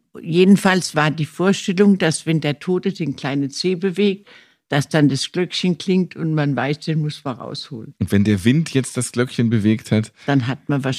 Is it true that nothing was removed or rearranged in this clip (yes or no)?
yes